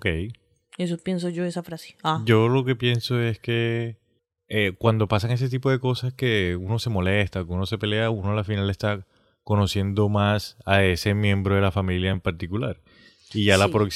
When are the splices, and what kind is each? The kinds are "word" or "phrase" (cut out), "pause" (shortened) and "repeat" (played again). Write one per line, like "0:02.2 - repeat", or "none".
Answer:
none